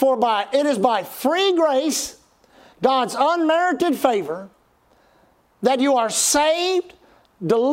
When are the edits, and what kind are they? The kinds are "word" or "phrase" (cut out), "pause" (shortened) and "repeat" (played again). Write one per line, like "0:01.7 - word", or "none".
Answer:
none